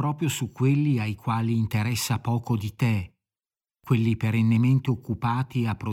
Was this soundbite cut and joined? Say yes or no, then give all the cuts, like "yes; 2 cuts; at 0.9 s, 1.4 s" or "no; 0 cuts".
no; 0 cuts